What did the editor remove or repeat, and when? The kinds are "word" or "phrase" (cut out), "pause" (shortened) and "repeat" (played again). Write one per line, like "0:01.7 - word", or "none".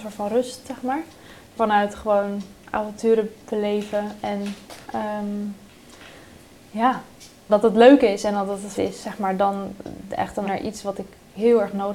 0:01.6 - phrase
0:03.4 - pause
0:04.8 - pause
0:07.5 - phrase
0:08.8 - word
0:10.4 - word